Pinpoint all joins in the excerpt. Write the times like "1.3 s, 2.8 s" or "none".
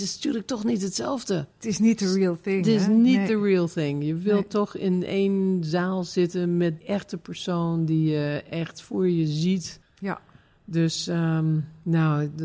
1.5 s, 6.8 s, 9.8 s